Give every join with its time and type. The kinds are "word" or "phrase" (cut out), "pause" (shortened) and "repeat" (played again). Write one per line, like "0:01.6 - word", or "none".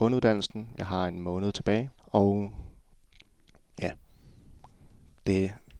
0:02.0 - pause